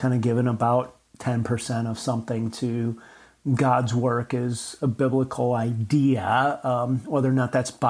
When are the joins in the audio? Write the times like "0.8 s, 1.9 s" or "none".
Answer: none